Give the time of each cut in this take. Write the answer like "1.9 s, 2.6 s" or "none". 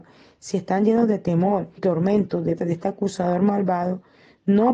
1.8 s, 2.6 s